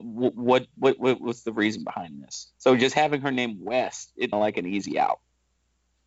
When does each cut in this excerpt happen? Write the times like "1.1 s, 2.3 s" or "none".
2.5 s, 4.3 s

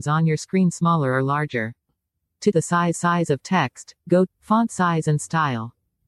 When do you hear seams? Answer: 2.5 s, 2.9 s, 4.3 s

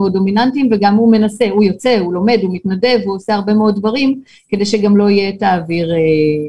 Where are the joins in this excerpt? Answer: none

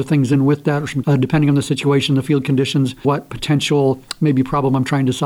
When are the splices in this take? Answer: 1.0 s, 3.0 s

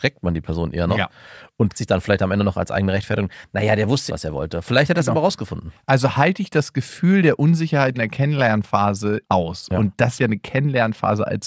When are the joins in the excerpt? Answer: 1.7 s, 4.1 s, 7.9 s, 9.2 s, 10.2 s

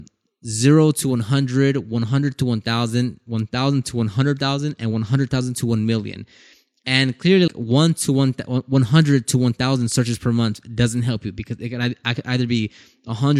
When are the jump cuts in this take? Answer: 7.5 s

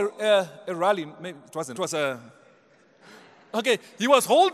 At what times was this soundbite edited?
1.7 s, 3.0 s

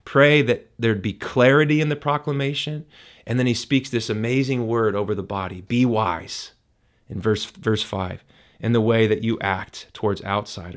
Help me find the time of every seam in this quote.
none

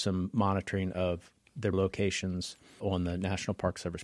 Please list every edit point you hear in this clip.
1.7 s

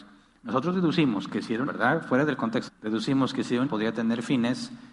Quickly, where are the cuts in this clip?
1.7 s, 2.7 s, 3.7 s

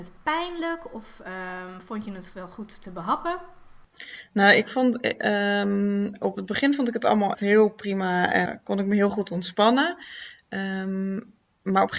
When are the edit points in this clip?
7.3 s, 8.5 s

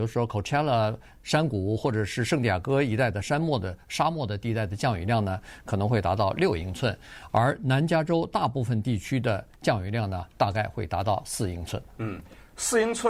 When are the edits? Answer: 9.6 s, 10.3 s

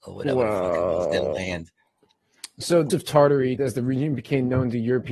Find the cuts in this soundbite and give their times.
2.9 s, 3.6 s

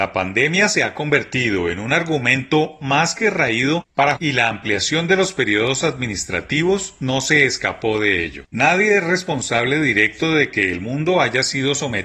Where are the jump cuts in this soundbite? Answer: 4.2 s, 8.5 s

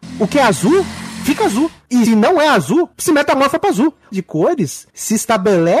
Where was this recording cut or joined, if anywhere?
2.1 s, 4.1 s, 4.9 s

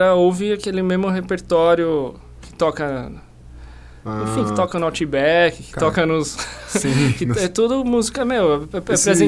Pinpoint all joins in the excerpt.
none

